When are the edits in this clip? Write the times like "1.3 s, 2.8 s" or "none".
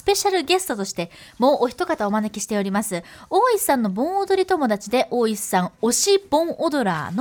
none